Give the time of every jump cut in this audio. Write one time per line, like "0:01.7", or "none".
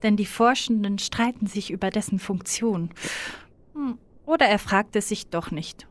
none